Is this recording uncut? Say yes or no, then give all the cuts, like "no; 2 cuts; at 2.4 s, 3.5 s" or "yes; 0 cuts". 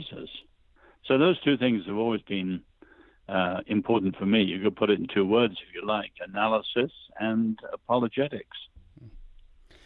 yes; 0 cuts